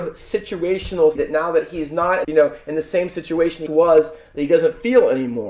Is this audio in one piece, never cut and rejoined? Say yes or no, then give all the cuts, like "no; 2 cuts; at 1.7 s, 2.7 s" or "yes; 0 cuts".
no; 3 cuts; at 1.2 s, 2.2 s, 3.7 s